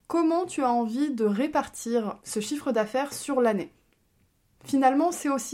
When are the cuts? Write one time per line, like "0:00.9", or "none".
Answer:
0:02.2